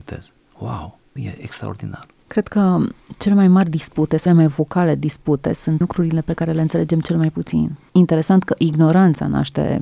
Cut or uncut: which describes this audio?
cut